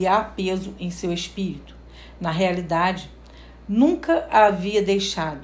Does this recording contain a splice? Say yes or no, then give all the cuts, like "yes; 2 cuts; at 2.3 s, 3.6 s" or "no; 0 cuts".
no; 0 cuts